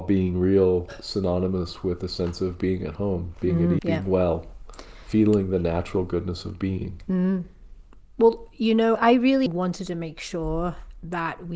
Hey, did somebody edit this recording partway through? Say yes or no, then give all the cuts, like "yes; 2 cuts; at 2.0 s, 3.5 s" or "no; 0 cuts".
yes; 3 cuts; at 3.8 s, 8.9 s, 9.5 s